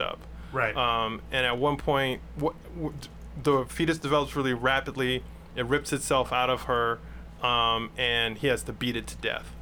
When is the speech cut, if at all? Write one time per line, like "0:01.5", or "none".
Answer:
none